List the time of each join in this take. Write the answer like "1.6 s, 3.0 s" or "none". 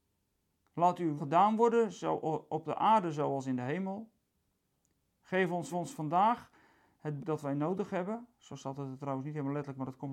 1.2 s, 5.7 s, 7.2 s

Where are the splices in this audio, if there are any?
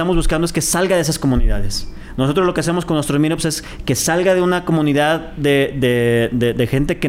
none

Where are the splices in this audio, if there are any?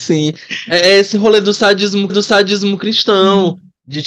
2.1 s

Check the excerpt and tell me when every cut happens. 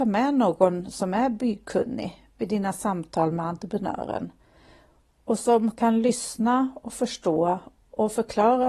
none

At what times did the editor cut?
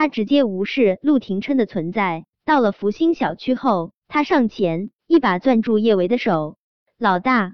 2.3 s, 4.0 s, 5.0 s

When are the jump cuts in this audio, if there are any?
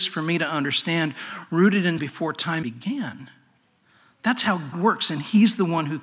2.0 s, 2.6 s, 4.7 s

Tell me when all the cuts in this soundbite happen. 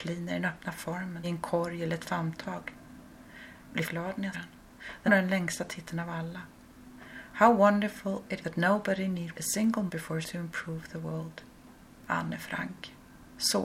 1.2 s, 3.9 s, 4.3 s, 5.1 s, 8.4 s, 9.3 s, 9.9 s, 10.2 s

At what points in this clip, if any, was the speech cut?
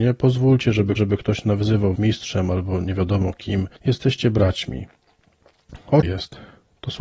1.0 s, 2.0 s, 3.8 s, 6.0 s

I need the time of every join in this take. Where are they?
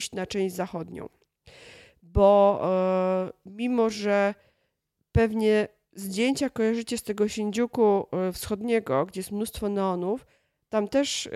none

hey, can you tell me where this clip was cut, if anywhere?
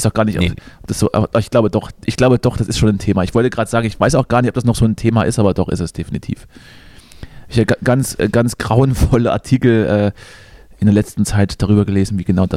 none

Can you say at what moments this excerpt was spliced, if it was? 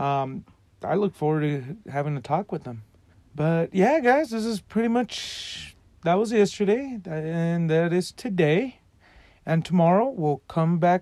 3.1 s

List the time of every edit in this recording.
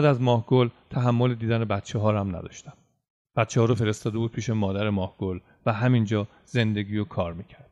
none

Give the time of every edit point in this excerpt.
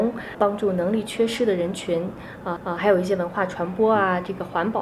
2.6 s

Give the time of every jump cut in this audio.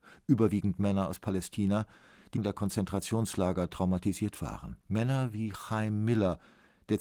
2.4 s, 4.8 s

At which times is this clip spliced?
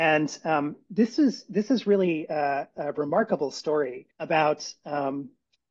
4.1 s

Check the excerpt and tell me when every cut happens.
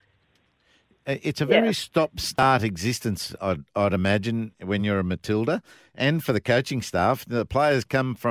none

